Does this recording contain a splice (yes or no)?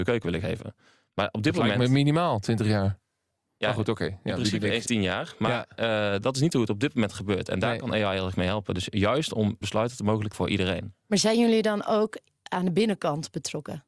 yes